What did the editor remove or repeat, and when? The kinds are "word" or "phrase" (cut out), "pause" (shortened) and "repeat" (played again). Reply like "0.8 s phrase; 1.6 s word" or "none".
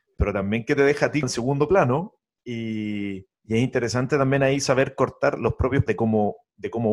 1.2 s word; 3.3 s pause; 5.9 s word